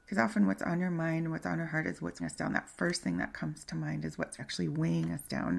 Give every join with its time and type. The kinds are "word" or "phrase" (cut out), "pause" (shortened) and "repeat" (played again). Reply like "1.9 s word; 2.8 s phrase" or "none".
2.2 s word; 4.4 s word